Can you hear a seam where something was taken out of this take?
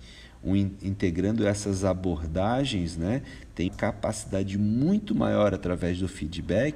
yes; 1 cut; at 3.7 s

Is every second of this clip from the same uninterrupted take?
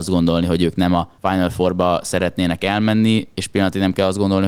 no; 1 cut; at 1.2 s

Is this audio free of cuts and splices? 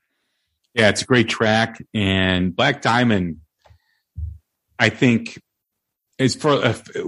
yes; 0 cuts

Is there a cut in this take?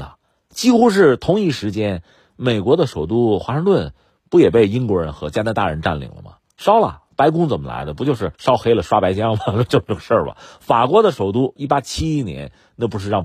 yes; 2 cuts; at 8.3 s, 11.6 s

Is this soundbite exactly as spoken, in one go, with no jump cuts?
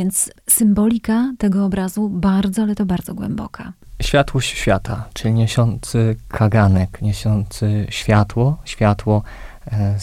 yes; 0 cuts

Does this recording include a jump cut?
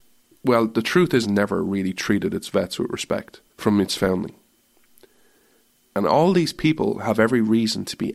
yes; 2 cuts; at 1.2 s, 3.5 s

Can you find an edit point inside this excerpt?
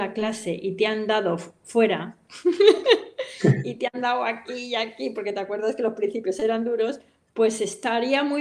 no; 0 cuts

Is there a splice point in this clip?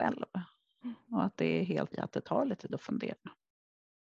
yes; 2 cuts; at 1.9 s, 2.7 s

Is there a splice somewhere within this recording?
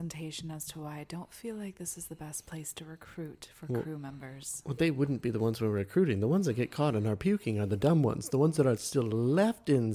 no; 0 cuts

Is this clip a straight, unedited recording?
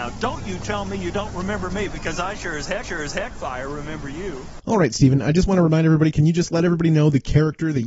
no; 1 cut; at 2.8 s

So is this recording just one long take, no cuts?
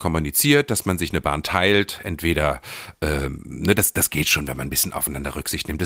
yes; 0 cuts

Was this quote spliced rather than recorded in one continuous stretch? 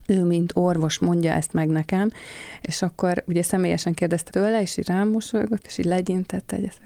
yes; 1 cut; at 4.3 s

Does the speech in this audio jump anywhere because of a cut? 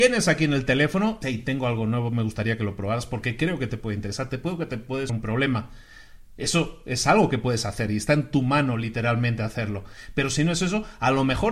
yes; 2 cuts; at 1.2 s, 5.1 s

